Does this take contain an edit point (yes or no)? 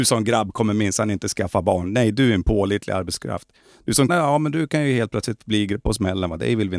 yes